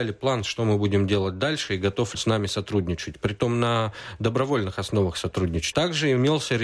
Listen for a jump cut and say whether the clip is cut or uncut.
cut